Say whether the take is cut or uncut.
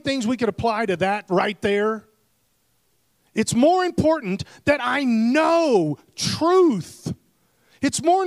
uncut